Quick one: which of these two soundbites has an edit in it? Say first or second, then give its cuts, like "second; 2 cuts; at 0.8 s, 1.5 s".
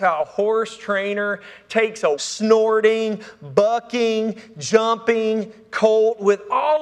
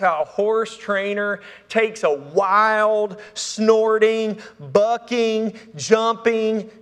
first; 1 cut; at 2.1 s